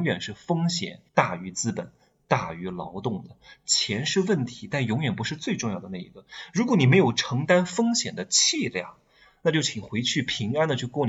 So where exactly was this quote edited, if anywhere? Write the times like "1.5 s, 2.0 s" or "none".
1.1 s